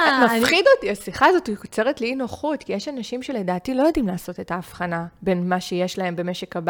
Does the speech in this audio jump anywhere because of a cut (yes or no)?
no